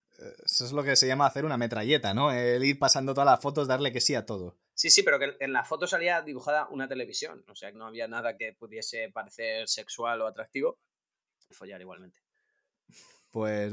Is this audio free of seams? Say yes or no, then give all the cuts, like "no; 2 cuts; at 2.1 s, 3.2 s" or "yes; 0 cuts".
no; 4 cuts; at 4.7 s, 7.7 s, 8.4 s, 11.5 s